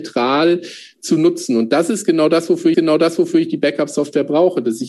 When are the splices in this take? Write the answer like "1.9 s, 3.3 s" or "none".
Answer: 2.7 s